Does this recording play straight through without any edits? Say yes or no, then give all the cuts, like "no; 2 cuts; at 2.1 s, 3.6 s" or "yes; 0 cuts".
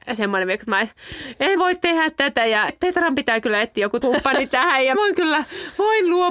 no; 4 cuts; at 1.6 s, 2.7 s, 4.0 s, 4.9 s